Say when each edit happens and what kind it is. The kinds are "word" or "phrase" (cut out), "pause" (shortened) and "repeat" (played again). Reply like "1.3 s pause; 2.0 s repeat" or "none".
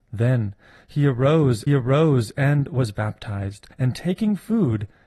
1.7 s repeat; 3.7 s pause